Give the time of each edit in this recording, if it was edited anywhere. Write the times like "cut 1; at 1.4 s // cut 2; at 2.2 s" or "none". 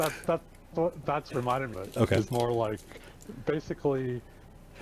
cut 1; at 1.3 s // cut 2; at 1.7 s // cut 3; at 2.3 s